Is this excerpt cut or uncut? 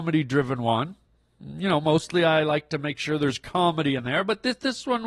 uncut